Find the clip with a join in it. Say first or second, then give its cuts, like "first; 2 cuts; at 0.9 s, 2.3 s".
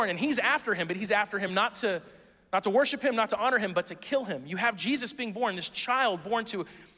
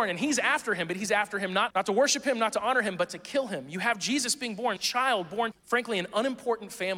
second; 3 cuts; at 1.7 s, 4.8 s, 5.5 s